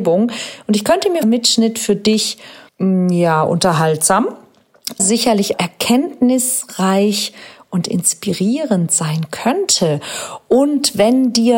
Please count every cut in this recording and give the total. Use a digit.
4